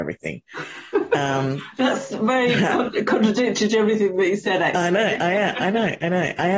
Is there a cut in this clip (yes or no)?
no